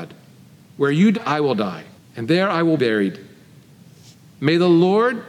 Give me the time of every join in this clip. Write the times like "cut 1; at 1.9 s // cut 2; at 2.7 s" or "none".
cut 1; at 1.1 s // cut 2; at 2.0 s // cut 3; at 2.8 s